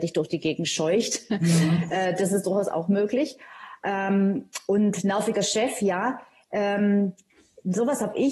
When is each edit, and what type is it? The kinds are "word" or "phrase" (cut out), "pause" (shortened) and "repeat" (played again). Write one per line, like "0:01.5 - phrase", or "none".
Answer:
none